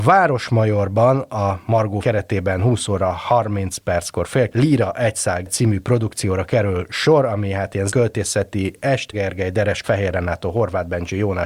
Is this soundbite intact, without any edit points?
no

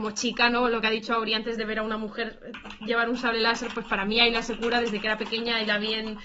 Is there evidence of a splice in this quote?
no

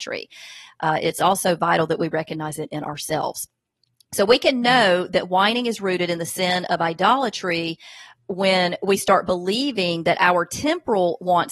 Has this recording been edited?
no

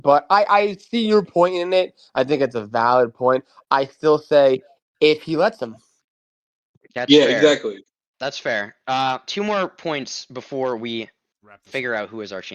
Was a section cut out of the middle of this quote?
no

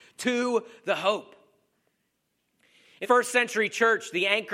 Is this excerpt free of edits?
no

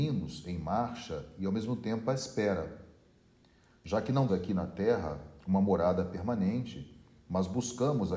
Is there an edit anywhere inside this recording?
yes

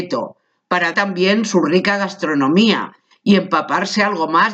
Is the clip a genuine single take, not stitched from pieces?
no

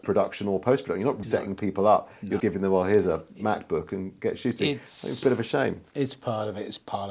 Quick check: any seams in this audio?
yes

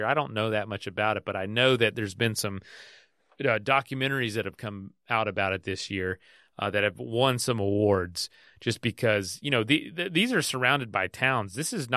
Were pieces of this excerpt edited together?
no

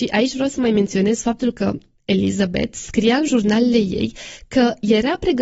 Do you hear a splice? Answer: no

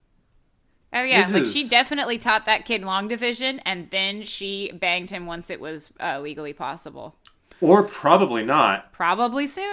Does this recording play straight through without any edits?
yes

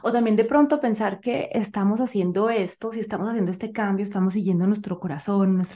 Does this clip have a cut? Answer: no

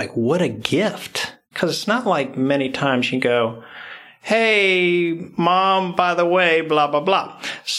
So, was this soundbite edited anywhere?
yes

